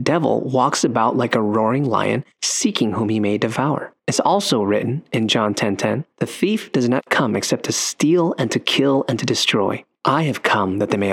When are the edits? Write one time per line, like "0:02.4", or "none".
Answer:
0:02.3
0:04.0
0:06.1
0:09.9

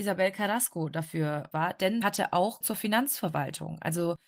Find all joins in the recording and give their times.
0:01.5
0:02.0
0:02.6

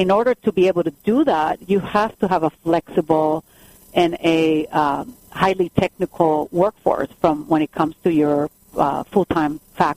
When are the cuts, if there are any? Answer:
none

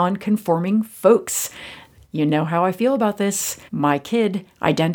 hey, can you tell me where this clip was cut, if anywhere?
0:03.7

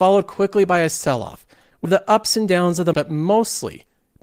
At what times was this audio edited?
0:01.8
0:02.9

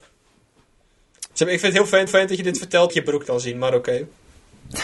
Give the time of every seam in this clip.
0:01.3
0:02.1
0:02.9
0:03.2

